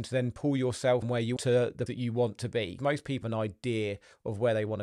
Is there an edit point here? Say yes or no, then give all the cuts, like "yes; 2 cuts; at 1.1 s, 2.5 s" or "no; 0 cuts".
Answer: yes; 5 cuts; at 1.0 s, 1.4 s, 1.9 s, 2.8 s, 3.2 s